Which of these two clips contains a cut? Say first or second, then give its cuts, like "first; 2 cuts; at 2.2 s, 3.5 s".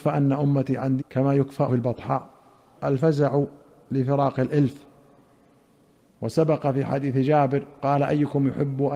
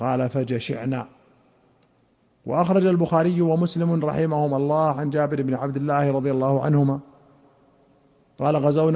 first; 3 cuts; at 1.0 s, 1.7 s, 2.7 s